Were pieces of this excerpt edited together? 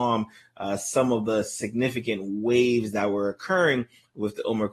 no; 0 cuts

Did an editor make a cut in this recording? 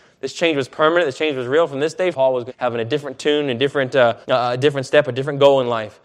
yes; 3 cuts; at 2.1 s, 2.5 s, 4.2 s

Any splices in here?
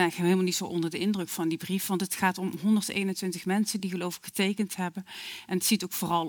no; 0 cuts

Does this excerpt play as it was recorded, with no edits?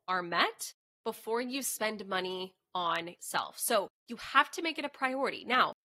no; 2 cuts; at 3.2 s, 4.0 s

